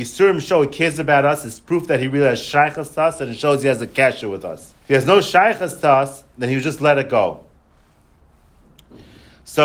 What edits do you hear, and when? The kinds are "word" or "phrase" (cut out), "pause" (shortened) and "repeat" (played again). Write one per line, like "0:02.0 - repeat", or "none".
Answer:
0:04.8 - pause